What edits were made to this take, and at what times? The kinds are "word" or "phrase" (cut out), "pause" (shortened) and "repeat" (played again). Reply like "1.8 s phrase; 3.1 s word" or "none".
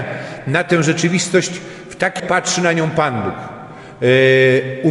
2.2 s phrase